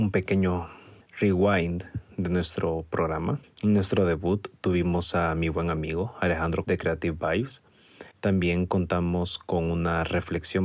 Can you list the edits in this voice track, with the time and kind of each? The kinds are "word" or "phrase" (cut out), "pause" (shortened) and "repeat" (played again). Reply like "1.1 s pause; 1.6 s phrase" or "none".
1.0 s pause; 3.4 s pause; 6.6 s word; 8.1 s pause